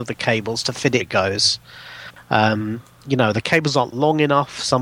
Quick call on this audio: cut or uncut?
cut